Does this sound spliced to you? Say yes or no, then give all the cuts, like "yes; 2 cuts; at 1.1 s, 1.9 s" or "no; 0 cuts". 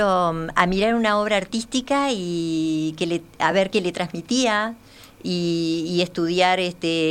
no; 0 cuts